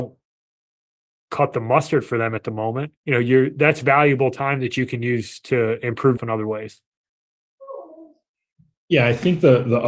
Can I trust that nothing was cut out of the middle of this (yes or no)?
no